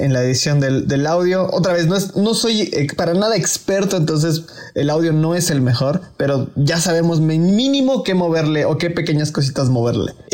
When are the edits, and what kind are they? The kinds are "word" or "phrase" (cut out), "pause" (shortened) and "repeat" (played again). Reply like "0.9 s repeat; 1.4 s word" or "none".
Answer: none